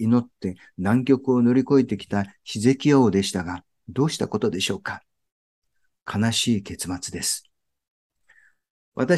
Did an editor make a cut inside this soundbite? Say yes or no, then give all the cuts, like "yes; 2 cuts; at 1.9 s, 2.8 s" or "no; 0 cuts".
no; 0 cuts